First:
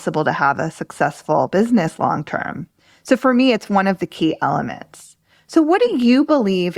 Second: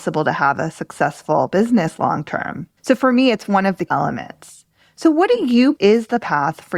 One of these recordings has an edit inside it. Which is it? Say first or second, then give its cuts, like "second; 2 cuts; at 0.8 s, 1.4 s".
second; 3 cuts; at 2.8 s, 3.9 s, 5.8 s